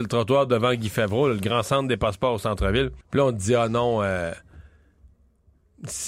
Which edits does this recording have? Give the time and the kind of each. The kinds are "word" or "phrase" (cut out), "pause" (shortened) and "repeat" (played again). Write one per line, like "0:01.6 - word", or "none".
0:03.0 - pause

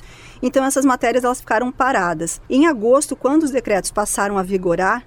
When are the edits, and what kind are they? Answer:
0:02.5 - pause

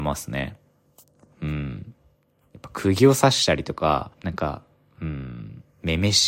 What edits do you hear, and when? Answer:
0:04.1 - pause

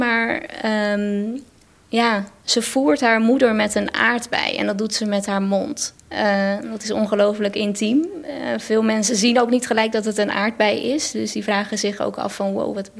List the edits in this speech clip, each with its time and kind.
0:06.0 - pause

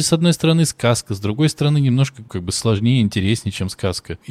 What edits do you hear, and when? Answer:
0:02.3 - word

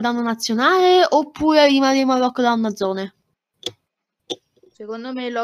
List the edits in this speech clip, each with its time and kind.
none

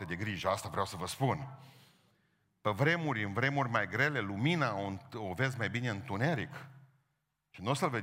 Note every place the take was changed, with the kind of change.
none

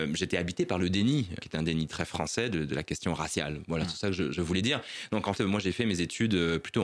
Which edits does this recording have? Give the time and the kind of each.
0:01.4 - word
0:05.3 - word

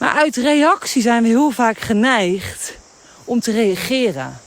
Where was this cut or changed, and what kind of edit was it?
none

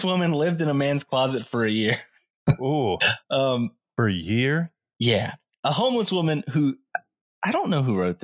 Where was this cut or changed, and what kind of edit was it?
none

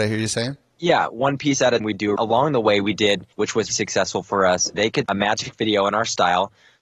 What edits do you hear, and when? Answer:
0:01.8 - word
0:02.2 - phrase
0:03.3 - pause
0:03.7 - word
0:04.7 - phrase
0:05.1 - word

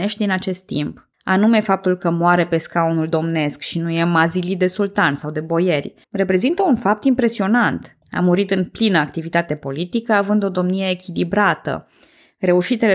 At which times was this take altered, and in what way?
0:01.1 - pause
0:06.0 - pause
0:08.0 - pause

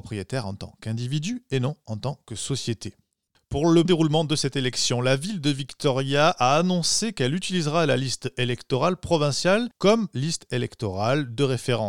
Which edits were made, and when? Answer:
0:03.9 - word

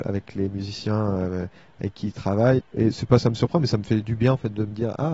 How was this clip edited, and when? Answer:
0:02.6 - word

